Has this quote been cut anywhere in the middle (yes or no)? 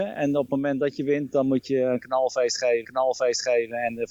yes